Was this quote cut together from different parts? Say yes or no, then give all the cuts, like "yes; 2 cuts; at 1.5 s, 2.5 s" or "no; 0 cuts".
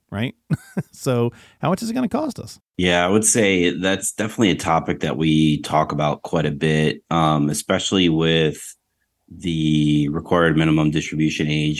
no; 0 cuts